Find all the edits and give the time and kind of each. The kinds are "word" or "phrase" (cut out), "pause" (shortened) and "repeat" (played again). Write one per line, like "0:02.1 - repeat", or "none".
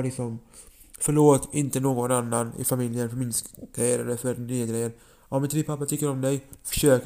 none